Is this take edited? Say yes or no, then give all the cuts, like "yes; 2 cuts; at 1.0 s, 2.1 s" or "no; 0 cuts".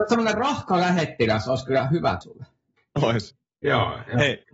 yes; 1 cut; at 2.2 s